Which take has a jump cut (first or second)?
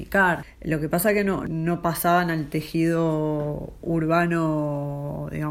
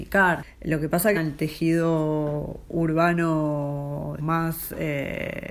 second